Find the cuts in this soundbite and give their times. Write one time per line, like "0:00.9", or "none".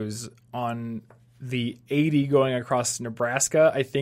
none